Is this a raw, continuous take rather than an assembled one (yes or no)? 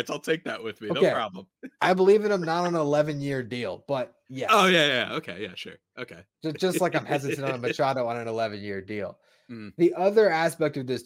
yes